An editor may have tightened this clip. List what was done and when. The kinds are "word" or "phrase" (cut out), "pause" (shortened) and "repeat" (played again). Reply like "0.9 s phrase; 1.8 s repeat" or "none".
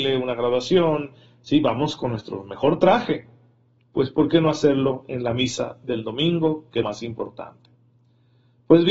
6.8 s word